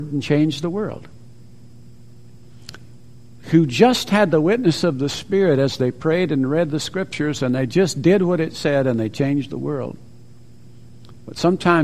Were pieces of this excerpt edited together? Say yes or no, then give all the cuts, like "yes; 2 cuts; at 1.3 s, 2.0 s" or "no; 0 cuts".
no; 0 cuts